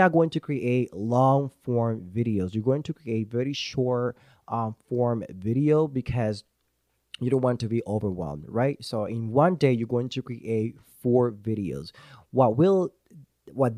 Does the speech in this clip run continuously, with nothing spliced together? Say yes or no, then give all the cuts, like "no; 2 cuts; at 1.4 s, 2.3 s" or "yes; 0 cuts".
yes; 0 cuts